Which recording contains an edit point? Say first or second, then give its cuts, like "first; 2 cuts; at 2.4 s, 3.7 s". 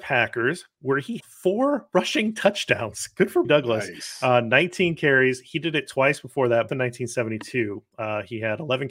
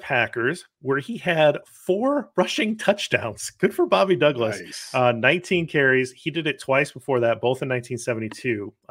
first; 3 cuts; at 1.2 s, 3.4 s, 6.7 s